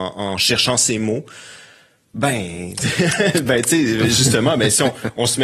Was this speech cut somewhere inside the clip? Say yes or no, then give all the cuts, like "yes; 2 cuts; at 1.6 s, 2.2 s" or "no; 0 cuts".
no; 0 cuts